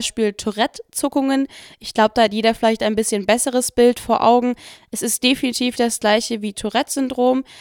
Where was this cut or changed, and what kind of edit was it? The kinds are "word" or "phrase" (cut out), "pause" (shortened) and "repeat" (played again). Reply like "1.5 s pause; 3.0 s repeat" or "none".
5.8 s word